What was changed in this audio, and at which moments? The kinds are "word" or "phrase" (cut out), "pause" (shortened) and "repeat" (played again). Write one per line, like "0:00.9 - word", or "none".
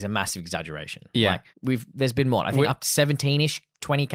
0:01.5 - pause